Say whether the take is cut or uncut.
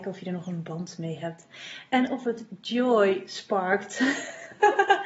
uncut